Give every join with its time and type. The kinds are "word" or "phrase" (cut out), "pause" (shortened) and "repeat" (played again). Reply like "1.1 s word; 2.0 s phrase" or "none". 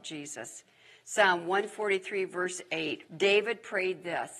3.1 s pause